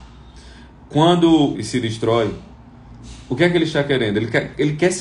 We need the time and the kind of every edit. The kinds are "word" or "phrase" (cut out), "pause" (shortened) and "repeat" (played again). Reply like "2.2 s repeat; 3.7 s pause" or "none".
1.5 s phrase